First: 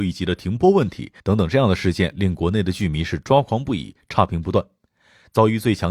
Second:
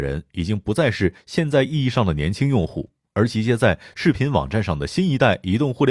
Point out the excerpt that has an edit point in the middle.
first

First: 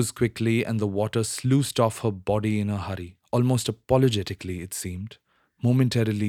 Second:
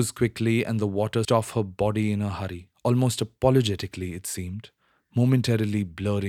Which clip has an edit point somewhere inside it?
second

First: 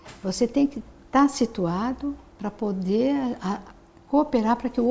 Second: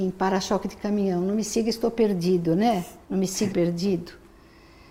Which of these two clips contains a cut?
second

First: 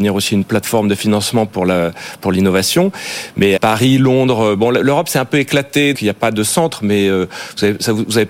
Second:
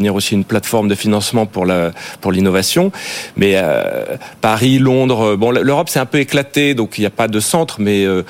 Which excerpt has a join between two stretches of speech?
first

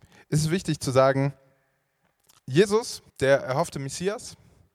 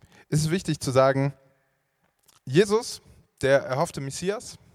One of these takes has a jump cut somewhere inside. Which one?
first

